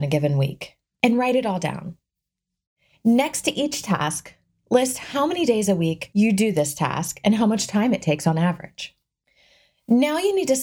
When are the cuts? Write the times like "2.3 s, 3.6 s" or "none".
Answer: none